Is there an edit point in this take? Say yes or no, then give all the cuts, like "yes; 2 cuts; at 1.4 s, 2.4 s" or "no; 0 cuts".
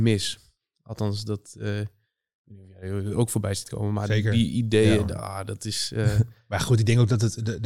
no; 0 cuts